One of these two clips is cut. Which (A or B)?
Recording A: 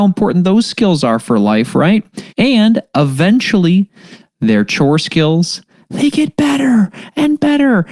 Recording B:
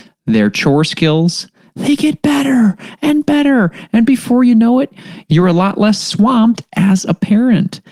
A